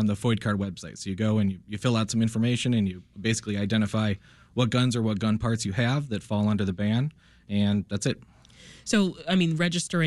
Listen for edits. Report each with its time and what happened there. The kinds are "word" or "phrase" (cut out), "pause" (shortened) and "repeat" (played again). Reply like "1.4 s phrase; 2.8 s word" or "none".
none